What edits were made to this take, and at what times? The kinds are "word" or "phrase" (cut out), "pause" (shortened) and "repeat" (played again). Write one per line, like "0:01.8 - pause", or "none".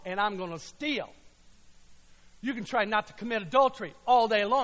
none